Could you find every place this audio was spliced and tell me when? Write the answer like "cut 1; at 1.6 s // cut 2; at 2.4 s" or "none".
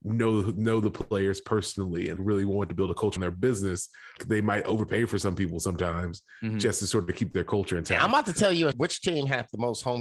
cut 1; at 2.2 s // cut 2; at 3.2 s // cut 3; at 4.2 s // cut 4; at 8.7 s